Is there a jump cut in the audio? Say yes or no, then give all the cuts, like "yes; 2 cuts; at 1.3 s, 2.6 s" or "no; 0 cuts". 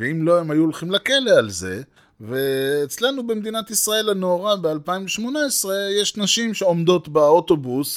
yes; 1 cut; at 2.0 s